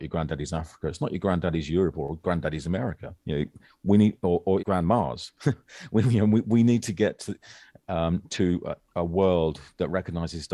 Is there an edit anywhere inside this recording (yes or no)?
yes